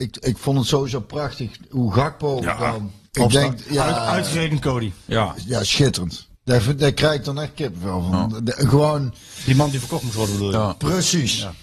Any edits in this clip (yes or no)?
yes